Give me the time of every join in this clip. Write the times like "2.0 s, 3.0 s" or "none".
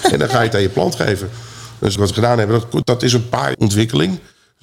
2.0 s, 2.8 s, 3.5 s